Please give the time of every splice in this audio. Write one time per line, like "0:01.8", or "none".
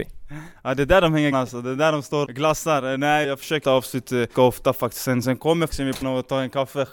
0:01.3
0:02.2
0:03.2
0:03.6
0:04.3
0:05.2
0:05.7
0:06.0